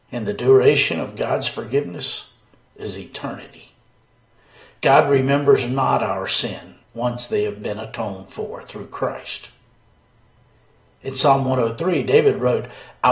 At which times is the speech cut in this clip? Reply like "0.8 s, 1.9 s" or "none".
6.8 s